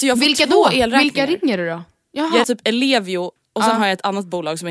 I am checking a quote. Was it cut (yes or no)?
yes